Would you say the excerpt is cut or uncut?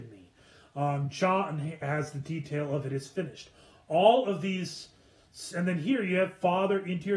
uncut